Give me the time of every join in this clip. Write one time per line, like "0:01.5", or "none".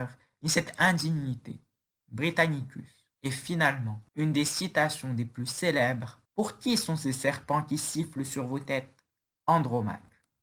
0:03.1
0:04.1
0:06.2